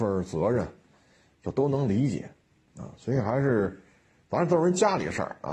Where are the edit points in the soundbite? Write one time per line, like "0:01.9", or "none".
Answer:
none